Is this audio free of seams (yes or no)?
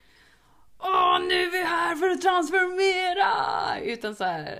yes